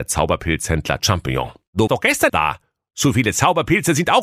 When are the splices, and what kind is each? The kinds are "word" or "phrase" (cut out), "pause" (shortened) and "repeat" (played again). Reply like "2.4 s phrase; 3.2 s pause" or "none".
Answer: 1.0 s word; 1.9 s word; 2.3 s word